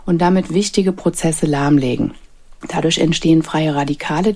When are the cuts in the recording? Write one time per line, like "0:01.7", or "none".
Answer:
none